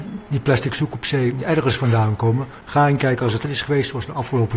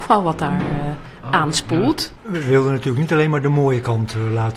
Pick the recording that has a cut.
first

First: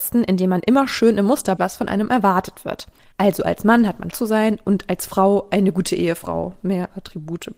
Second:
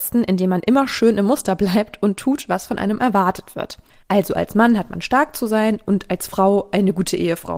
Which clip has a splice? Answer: first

